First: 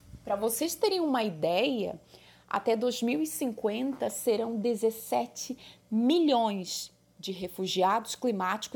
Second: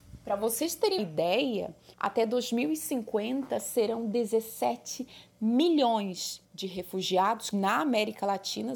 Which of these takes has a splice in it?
second; 4 cuts; at 1.0 s, 1.9 s, 6.4 s, 7.5 s

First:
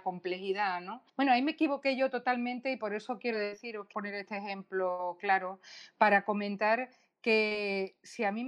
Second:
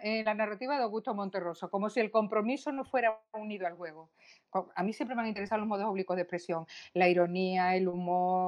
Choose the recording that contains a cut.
first; 2 cuts; at 1.1 s, 3.9 s

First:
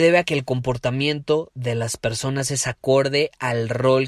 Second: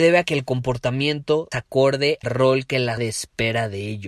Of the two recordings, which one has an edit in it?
second; 3 cuts; at 1.5 s, 2.2 s, 3.0 s

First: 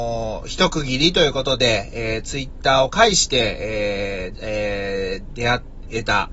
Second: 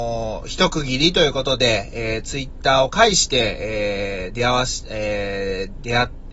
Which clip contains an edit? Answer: first; 1 cut; at 4.3 s

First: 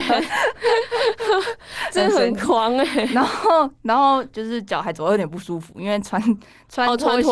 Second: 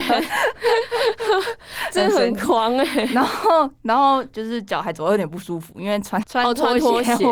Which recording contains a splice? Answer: second; 1 cut; at 6.2 s

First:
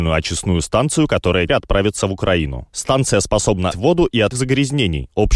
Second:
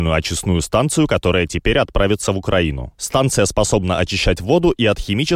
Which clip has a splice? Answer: first; 3 cuts; at 1.5 s, 3.7 s, 4.3 s

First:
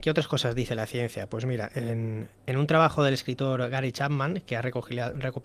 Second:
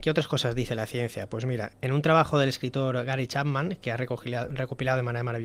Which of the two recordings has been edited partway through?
second; 1 cut; at 1.7 s

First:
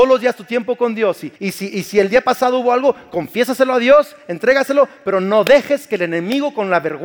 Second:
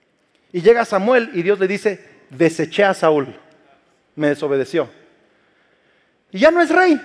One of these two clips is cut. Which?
first; 1 cut; at 1.4 s

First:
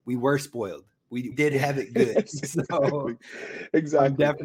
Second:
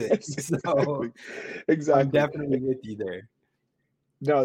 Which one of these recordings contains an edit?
first; 1 cut; at 1.3 s

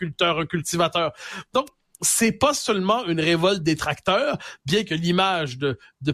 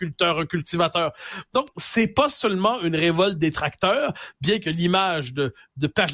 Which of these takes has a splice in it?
second; 1 cut; at 1.7 s

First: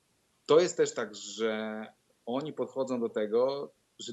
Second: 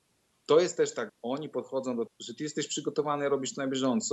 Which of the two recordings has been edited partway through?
second; 2 cuts; at 1.1 s, 2.1 s

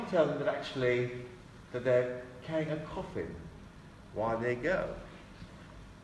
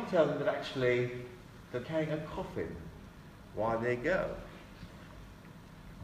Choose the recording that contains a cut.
second; 1 cut; at 1.8 s

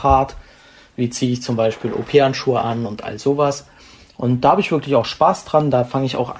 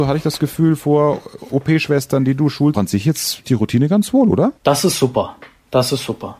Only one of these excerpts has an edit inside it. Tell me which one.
second; 3 cuts; at 2.7 s, 3.4 s, 4.6 s

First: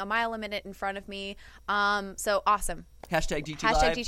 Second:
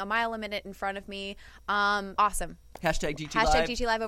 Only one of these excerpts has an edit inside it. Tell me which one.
second; 1 cut; at 2.2 s

